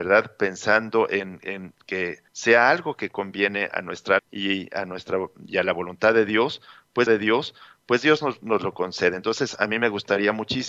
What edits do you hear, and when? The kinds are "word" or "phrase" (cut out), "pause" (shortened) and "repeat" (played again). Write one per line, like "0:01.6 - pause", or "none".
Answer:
0:02.3 - pause
0:04.2 - word
0:07.1 - repeat